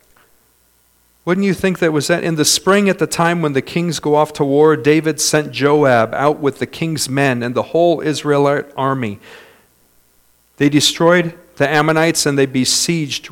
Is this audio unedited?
yes; 0 cuts

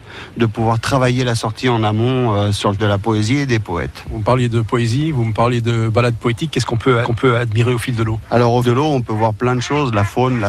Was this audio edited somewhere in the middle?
yes; 3 cuts; at 2.8 s, 7.0 s, 8.6 s

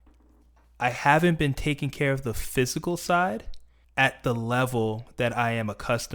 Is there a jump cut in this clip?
yes; 1 cut; at 3.8 s

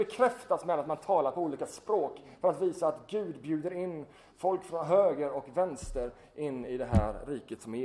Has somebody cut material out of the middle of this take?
no; 0 cuts

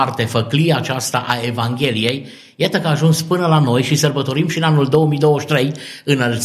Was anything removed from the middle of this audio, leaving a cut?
no; 0 cuts

